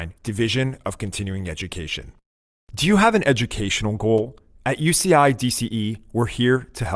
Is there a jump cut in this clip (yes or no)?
no